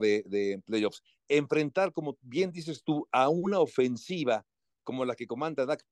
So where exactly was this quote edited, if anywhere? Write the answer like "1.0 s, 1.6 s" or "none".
none